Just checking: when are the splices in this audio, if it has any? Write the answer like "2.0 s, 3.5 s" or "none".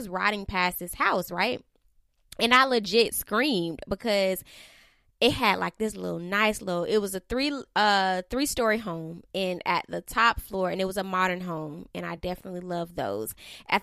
none